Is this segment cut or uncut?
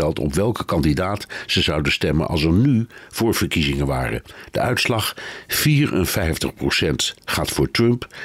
uncut